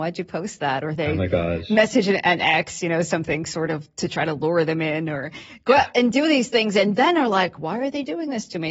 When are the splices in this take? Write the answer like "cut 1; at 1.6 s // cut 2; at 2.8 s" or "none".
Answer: cut 1; at 3.9 s